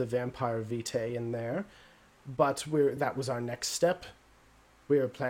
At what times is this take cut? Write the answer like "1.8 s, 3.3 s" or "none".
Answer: none